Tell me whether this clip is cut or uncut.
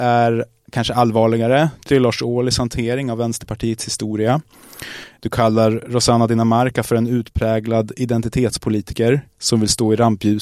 cut